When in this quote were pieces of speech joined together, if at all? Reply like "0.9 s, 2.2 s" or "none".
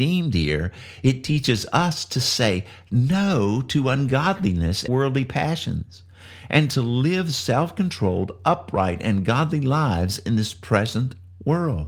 4.9 s

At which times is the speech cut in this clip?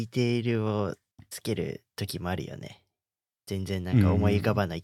none

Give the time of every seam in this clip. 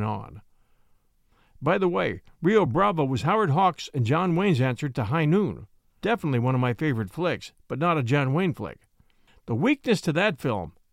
none

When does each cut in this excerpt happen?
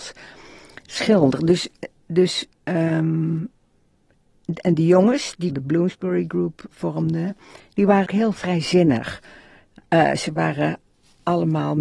2.5 s, 5.5 s, 6.7 s, 8.1 s

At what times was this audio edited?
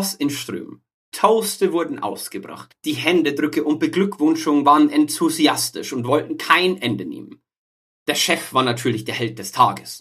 none

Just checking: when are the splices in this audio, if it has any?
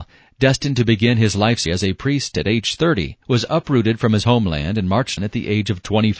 1.7 s, 3.2 s, 5.2 s

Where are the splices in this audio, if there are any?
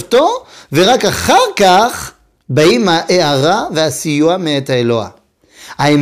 2.4 s

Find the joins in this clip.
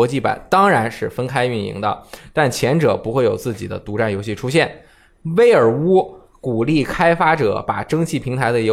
none

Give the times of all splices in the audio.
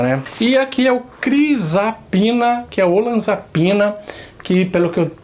none

